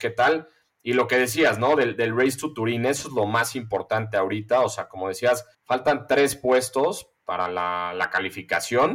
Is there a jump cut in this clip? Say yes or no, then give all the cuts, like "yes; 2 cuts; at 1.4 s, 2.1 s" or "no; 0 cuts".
yes; 1 cut; at 5.5 s